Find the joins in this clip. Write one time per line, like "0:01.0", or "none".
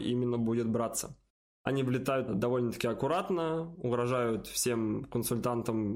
0:01.3
0:02.3